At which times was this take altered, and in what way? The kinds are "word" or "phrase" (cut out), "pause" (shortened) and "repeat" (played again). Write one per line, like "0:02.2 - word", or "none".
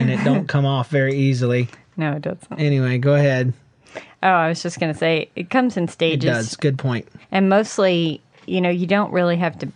0:07.2 - pause